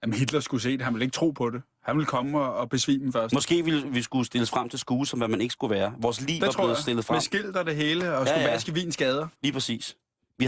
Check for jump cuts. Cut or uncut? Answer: cut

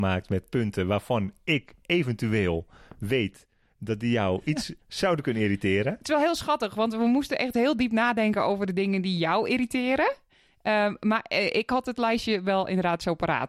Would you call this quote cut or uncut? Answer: cut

